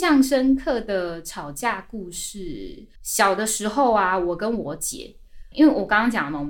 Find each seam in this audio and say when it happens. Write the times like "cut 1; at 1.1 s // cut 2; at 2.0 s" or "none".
cut 1; at 2.9 s